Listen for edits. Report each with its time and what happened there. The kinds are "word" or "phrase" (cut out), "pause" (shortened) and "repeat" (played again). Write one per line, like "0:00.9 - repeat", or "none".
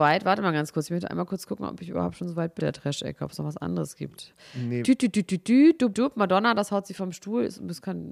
0:02.6 - word
0:05.9 - word